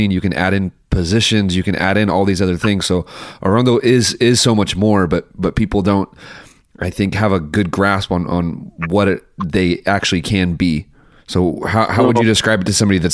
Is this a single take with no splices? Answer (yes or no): yes